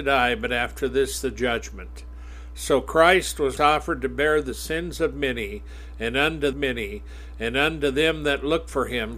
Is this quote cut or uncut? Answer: cut